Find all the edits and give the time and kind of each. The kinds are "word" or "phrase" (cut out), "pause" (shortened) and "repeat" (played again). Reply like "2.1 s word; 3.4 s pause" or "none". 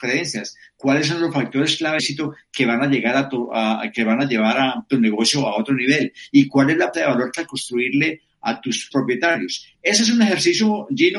2.0 s word; 6.9 s word; 7.4 s word; 8.9 s word